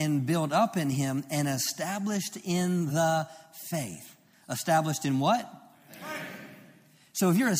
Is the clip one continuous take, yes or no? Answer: yes